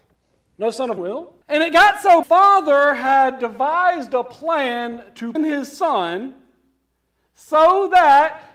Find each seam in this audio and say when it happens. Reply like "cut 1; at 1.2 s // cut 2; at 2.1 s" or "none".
cut 1; at 1.0 s // cut 2; at 1.4 s // cut 3; at 2.2 s // cut 4; at 5.4 s